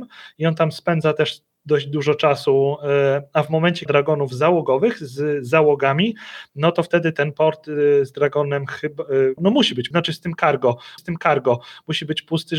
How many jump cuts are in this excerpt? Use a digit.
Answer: 4